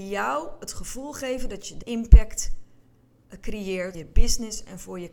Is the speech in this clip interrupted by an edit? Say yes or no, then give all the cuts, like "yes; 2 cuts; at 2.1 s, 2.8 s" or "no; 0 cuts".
yes; 2 cuts; at 1.8 s, 3.9 s